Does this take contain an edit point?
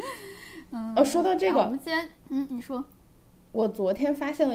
yes; 1 cut; at 2.2 s

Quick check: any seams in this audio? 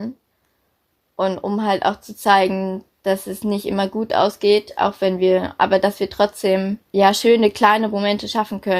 yes; 1 cut; at 6.8 s

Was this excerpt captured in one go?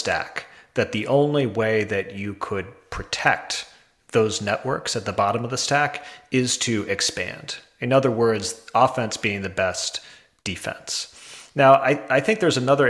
yes; 0 cuts

